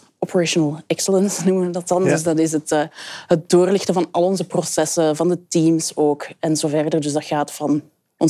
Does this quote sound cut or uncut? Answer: uncut